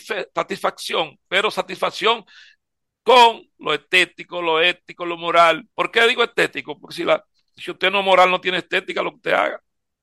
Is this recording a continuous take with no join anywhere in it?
no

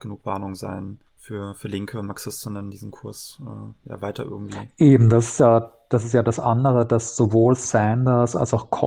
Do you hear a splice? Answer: yes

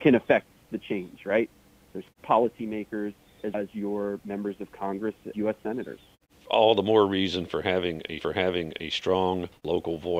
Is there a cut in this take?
yes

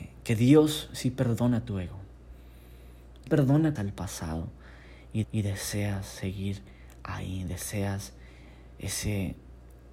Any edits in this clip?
yes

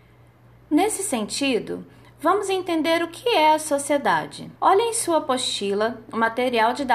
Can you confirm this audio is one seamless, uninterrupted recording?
no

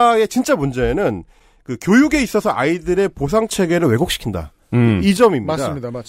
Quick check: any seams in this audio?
no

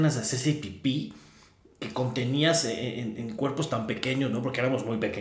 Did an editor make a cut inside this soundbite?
no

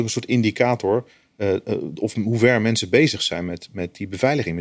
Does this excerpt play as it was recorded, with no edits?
yes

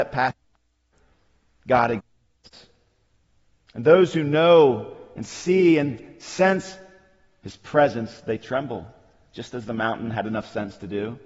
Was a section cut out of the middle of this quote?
no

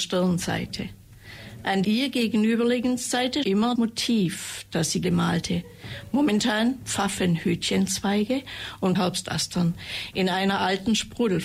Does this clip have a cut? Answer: yes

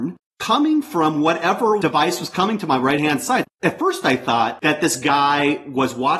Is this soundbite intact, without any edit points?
yes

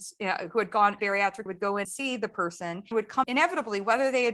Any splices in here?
yes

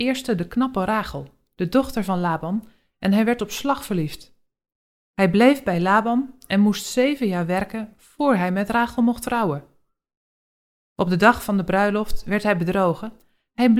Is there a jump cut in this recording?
no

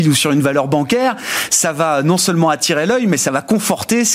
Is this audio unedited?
yes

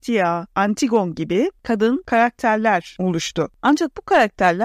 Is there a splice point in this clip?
no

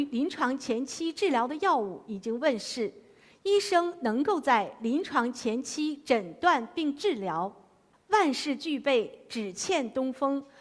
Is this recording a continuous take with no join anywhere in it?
yes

